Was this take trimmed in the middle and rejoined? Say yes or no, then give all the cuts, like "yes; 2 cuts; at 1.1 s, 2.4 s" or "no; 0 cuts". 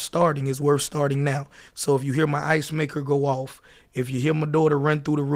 no; 0 cuts